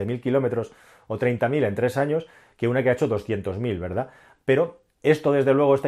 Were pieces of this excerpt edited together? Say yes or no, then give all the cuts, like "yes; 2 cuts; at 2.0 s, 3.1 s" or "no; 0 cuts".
no; 0 cuts